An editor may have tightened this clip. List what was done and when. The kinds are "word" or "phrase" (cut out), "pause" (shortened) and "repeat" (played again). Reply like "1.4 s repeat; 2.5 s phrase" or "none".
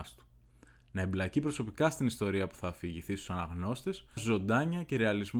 4.2 s word